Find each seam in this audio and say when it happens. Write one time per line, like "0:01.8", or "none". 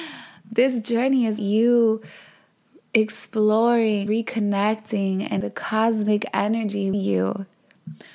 0:01.4
0:04.1
0:05.4
0:06.9